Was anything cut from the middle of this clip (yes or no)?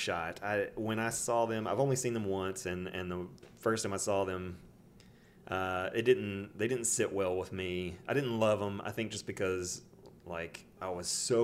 no